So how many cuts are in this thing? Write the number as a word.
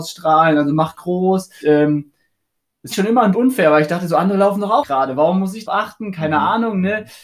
six